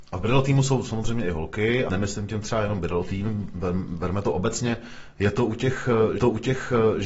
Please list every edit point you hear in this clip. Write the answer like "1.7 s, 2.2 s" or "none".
1.9 s, 6.2 s